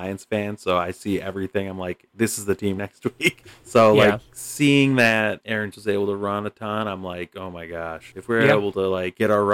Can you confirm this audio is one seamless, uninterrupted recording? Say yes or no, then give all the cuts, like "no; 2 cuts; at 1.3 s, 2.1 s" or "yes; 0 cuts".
no; 2 cuts; at 2.8 s, 5.7 s